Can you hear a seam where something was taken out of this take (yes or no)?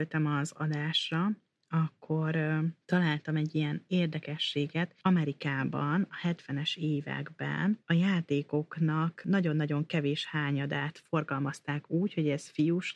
no